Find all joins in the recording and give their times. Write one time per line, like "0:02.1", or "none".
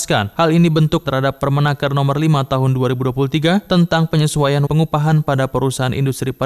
0:01.1
0:04.7

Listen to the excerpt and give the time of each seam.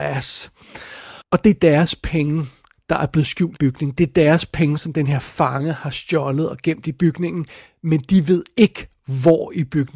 0:01.2
0:03.5

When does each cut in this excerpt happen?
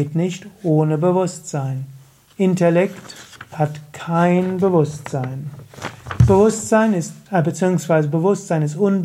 0:03.5
0:07.3

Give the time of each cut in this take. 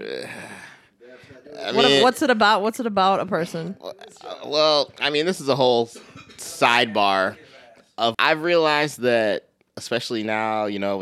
0:08.1

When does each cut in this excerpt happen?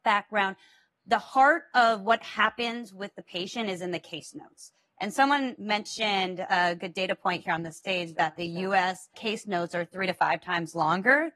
none

